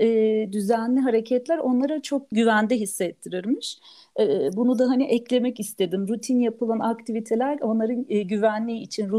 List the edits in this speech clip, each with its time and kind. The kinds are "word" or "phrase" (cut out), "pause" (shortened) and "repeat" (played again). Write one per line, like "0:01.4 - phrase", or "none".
0:02.3 - word